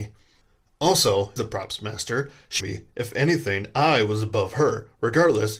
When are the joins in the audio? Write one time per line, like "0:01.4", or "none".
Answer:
0:01.4
0:02.6